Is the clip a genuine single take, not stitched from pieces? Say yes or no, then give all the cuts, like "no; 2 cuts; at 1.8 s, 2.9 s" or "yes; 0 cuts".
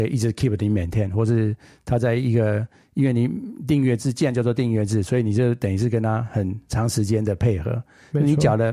yes; 0 cuts